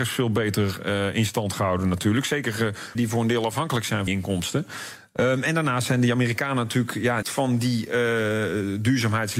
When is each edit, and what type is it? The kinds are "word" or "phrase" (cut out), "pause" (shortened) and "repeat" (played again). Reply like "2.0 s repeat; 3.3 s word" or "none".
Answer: 2.9 s word; 4.1 s word; 7.2 s word